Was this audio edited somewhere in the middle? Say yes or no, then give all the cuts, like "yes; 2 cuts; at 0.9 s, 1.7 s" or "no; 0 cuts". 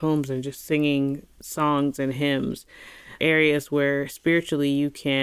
yes; 1 cut; at 3.2 s